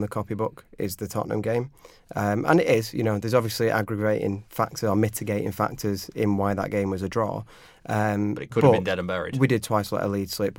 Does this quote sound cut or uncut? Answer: uncut